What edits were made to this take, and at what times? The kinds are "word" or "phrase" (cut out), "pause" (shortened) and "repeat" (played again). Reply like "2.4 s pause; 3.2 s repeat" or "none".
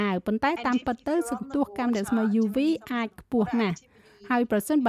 none

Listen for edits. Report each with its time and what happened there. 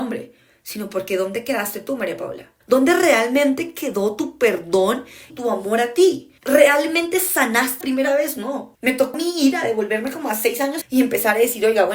2.6 s pause; 5.3 s word; 6.4 s pause; 7.8 s word; 8.7 s pause; 9.1 s word; 10.8 s phrase

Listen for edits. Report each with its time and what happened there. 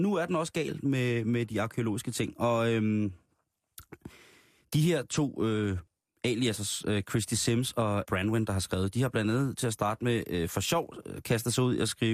8.0 s word

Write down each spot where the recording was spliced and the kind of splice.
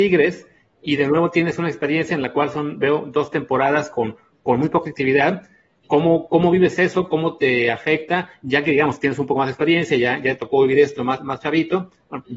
none

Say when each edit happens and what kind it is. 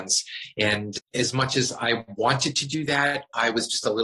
1.0 s word

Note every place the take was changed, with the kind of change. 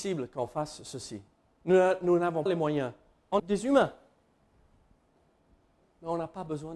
2.5 s word; 3.4 s word

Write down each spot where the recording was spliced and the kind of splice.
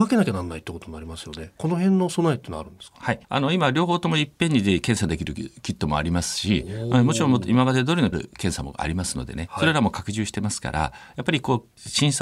3.2 s pause; 8.1 s word

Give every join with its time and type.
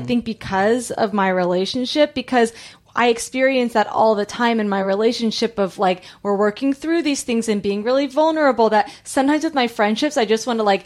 none

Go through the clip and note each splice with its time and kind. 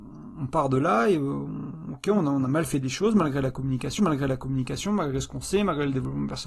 4.0 s repeat

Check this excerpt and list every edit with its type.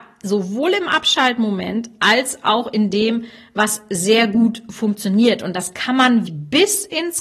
6.3 s word

